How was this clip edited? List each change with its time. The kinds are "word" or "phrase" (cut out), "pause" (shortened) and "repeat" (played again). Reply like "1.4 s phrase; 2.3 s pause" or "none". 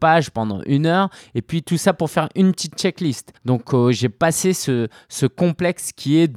3.4 s pause